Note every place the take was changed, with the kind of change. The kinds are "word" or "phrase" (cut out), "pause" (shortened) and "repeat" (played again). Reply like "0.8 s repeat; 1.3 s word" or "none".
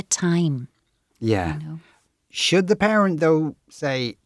none